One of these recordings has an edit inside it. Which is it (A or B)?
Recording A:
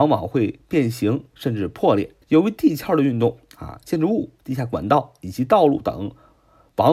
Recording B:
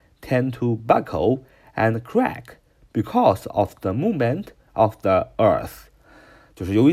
A